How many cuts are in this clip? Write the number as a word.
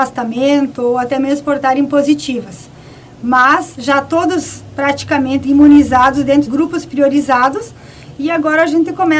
three